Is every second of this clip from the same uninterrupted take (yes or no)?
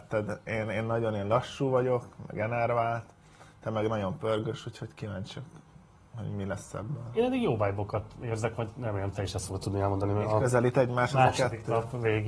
yes